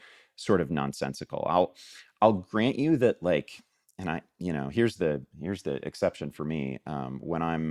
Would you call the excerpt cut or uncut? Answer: uncut